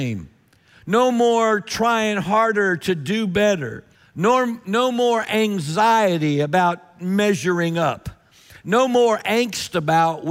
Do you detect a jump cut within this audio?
yes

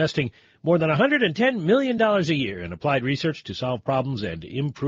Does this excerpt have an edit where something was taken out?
no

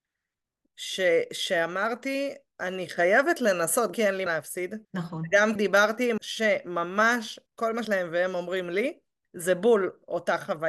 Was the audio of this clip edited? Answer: yes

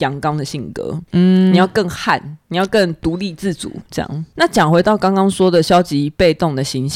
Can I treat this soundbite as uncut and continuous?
yes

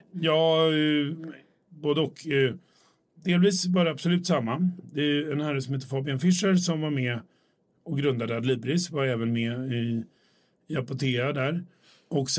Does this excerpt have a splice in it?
no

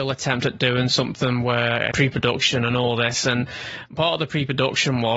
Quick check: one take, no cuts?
no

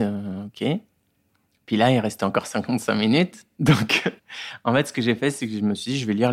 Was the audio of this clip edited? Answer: yes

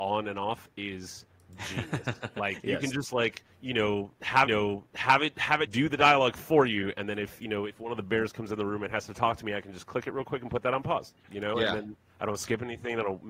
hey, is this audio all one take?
no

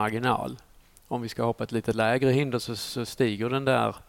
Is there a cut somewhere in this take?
no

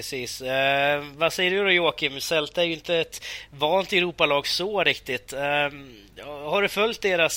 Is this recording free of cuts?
yes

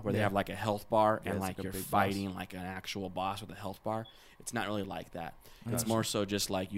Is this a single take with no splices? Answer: yes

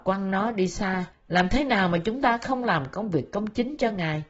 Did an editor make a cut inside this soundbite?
yes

